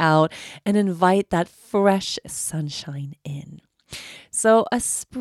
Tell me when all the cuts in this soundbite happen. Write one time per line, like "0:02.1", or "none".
0:02.2